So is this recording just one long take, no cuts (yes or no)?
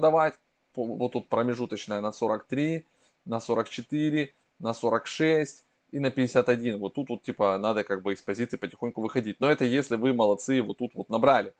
yes